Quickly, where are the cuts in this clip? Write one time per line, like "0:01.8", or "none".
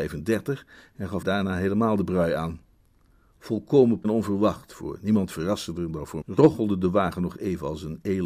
0:01.2
0:04.0
0:06.2